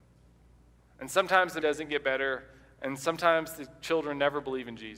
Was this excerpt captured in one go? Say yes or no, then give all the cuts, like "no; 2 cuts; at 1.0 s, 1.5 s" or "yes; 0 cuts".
no; 1 cut; at 1.6 s